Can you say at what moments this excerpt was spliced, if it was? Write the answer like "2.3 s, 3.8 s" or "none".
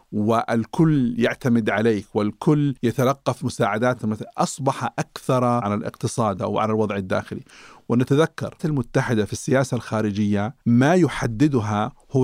2.8 s, 4.0 s, 5.6 s, 6.4 s, 8.6 s

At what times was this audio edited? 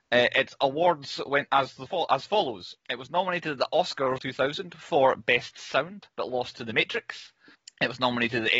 2.8 s, 4.2 s, 6.1 s, 7.5 s

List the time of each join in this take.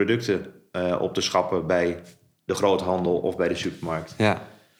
none

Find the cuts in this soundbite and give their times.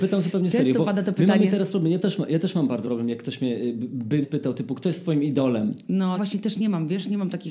2.8 s, 4.2 s, 6.1 s

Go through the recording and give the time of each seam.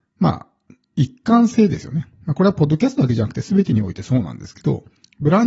2.1 s

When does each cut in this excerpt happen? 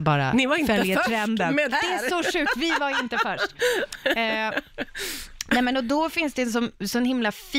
1.7 s

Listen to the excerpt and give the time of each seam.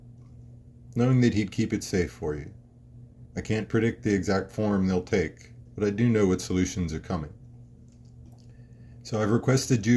5.7 s

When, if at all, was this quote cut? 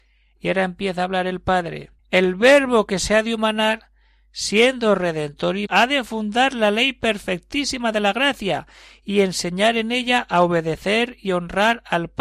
2.0 s, 5.7 s

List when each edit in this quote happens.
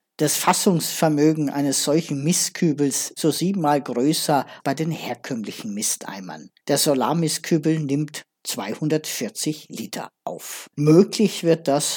3.2 s, 4.6 s, 6.6 s, 10.7 s

